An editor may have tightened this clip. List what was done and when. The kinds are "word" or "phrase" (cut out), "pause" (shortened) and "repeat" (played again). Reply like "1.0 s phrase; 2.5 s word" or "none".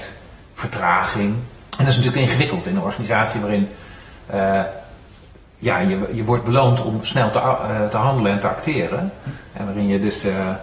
1.7 s pause